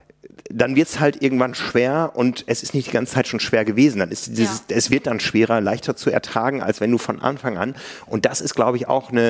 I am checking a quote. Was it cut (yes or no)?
no